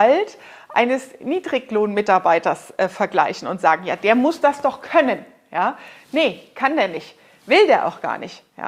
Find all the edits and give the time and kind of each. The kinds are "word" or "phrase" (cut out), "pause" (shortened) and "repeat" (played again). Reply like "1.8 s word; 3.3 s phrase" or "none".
none